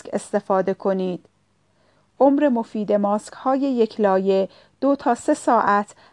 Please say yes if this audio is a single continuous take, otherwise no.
yes